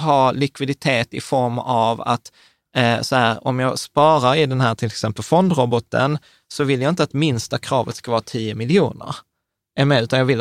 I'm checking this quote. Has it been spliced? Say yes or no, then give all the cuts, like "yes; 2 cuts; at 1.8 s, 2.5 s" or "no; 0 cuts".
no; 0 cuts